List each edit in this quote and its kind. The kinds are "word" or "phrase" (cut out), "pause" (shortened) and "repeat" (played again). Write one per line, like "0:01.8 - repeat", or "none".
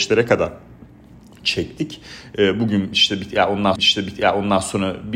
0:03.8 - repeat